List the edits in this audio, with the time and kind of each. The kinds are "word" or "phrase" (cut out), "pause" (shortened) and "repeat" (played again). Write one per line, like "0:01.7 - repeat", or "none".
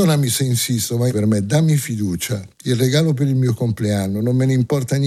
0:01.1 - word

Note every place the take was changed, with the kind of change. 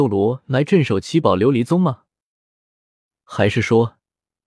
none

